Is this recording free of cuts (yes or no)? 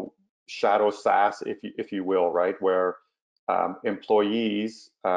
yes